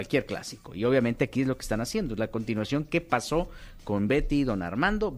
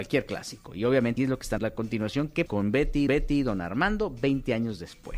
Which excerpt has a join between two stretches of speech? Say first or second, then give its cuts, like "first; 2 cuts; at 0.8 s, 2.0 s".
second; 4 cuts; at 1.2 s, 1.6 s, 2.5 s, 3.1 s